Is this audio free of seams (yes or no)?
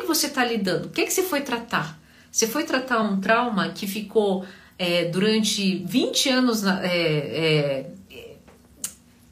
yes